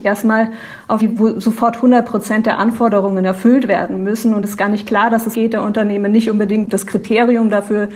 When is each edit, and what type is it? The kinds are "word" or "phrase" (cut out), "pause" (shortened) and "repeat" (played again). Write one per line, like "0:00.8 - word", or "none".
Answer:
0:01.0 - word
0:04.4 - word
0:05.3 - phrase